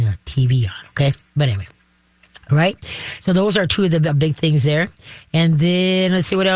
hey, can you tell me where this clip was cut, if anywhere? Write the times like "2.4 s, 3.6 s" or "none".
4.1 s